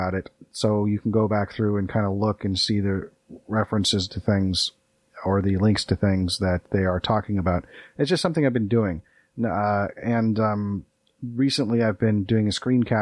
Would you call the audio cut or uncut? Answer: uncut